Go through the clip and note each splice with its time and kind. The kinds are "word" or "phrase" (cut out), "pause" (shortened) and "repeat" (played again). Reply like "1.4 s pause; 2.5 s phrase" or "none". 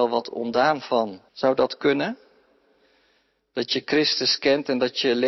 1.3 s pause